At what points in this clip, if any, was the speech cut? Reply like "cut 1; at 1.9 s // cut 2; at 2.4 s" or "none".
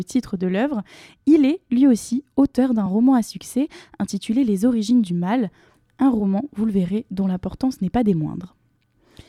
none